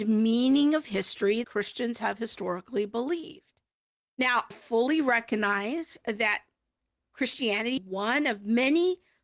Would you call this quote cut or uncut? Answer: cut